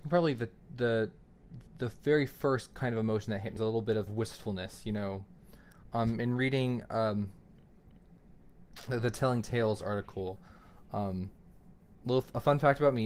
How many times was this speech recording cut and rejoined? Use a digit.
3